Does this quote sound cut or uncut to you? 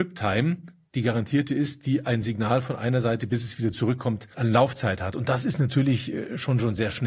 uncut